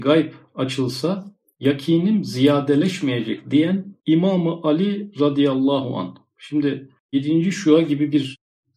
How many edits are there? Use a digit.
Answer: 2